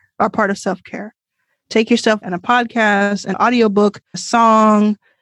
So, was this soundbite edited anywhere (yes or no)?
yes